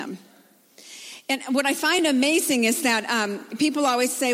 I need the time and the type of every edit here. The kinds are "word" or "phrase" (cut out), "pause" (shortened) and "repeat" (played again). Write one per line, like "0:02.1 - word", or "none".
none